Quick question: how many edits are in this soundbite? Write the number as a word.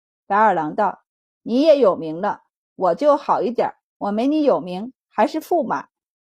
zero